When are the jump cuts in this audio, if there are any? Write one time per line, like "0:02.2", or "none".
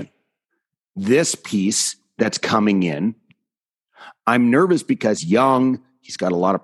0:05.2